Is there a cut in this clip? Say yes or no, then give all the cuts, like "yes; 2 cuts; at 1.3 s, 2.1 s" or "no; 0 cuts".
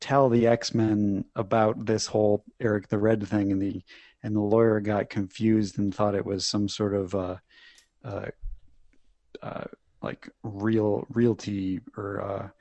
no; 0 cuts